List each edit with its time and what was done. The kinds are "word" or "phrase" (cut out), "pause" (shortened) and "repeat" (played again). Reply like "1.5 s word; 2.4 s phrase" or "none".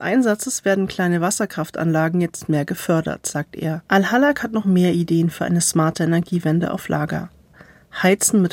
3.9 s pause